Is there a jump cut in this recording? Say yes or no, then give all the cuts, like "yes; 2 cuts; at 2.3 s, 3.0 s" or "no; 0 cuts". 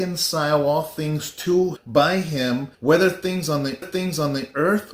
yes; 3 cuts; at 1.8 s, 2.7 s, 3.8 s